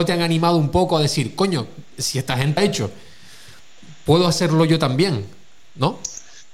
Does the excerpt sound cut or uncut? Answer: cut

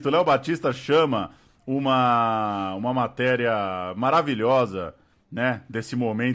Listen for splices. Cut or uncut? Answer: uncut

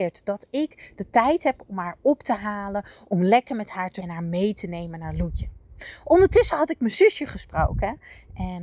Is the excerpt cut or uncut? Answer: cut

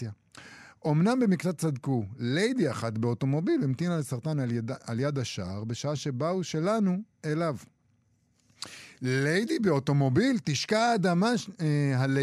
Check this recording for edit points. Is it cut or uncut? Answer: uncut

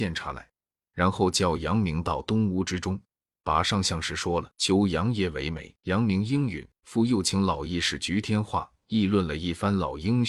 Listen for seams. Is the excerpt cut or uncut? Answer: cut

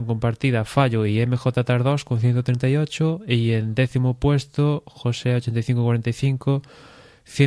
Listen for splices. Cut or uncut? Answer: uncut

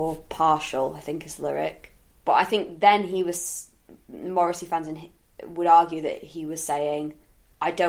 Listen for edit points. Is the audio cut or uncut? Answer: uncut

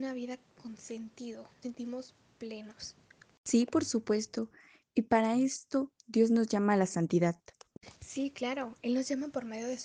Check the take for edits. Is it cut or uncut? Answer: cut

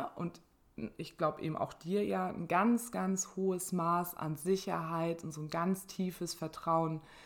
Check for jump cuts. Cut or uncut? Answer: uncut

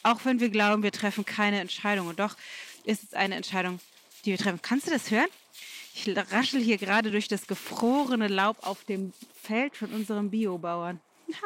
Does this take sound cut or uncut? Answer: uncut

